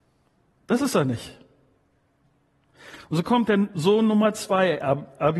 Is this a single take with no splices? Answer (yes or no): yes